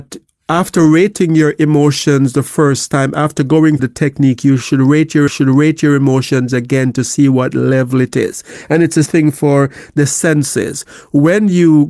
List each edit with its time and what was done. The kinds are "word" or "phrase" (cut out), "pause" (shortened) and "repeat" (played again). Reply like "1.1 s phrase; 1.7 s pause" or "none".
3.8 s word; 5.3 s repeat; 9.1 s word

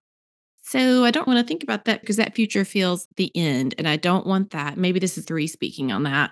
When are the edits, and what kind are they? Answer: 1.3 s word; 2.0 s word; 3.1 s word; 5.2 s phrase

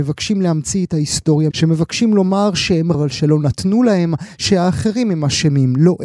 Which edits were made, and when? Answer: 1.5 s word; 2.9 s word

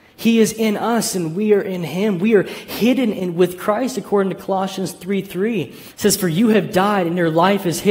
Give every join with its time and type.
5.9 s pause

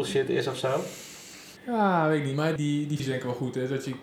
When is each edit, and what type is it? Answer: 1.6 s pause; 2.6 s word; 3.0 s word

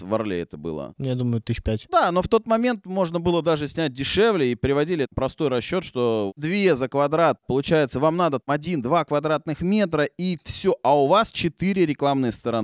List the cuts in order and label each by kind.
none

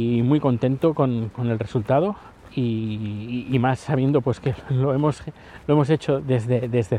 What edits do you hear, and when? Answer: 2.4 s pause

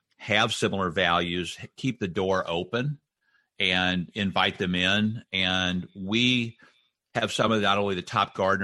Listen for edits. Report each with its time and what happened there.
none

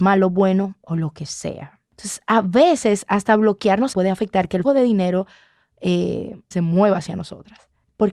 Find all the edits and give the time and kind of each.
3.9 s phrase; 4.6 s word; 6.5 s word

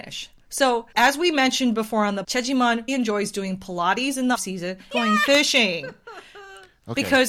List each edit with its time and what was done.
0.9 s pause; 2.2 s word; 2.9 s word; 4.3 s word; 4.9 s phrase

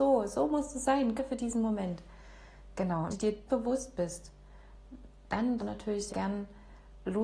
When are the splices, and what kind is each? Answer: 1.2 s word; 3.1 s word; 3.5 s word; 5.6 s word; 6.1 s word

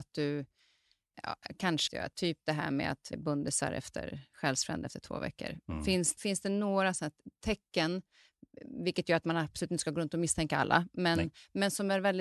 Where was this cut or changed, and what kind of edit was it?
1.1 s word; 1.9 s phrase; 3.1 s word; 6.2 s word

